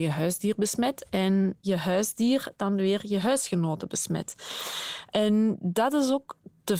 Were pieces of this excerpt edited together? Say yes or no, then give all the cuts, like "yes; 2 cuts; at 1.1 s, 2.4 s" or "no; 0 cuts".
no; 0 cuts